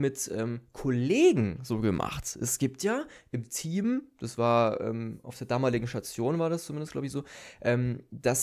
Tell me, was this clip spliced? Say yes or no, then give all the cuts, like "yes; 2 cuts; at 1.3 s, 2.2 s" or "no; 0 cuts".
no; 0 cuts